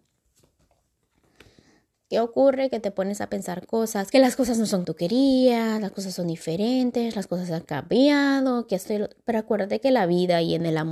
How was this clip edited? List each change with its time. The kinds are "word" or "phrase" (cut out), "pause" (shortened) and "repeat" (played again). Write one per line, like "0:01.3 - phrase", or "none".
0:04.1 - phrase
0:04.8 - word